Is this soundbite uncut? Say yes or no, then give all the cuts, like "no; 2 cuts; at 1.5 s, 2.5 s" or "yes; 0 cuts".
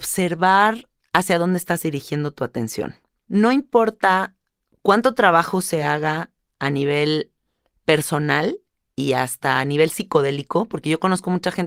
yes; 0 cuts